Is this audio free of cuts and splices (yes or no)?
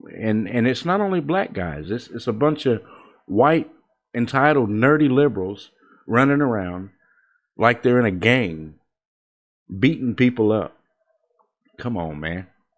yes